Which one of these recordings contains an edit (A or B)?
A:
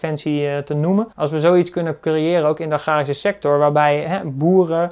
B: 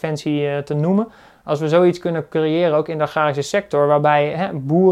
A